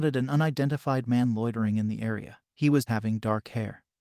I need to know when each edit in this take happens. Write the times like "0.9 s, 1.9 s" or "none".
2.5 s, 2.9 s

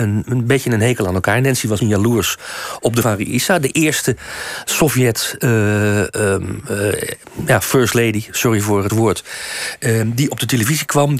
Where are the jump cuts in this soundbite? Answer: 1.8 s, 3.0 s, 8.9 s

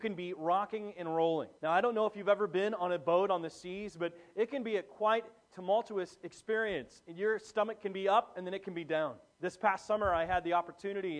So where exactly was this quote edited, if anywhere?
1.6 s, 9.3 s

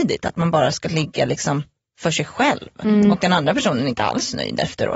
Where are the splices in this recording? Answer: none

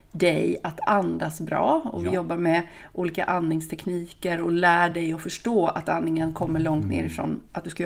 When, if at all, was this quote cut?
none

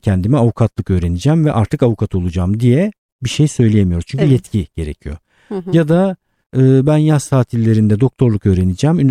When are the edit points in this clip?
none

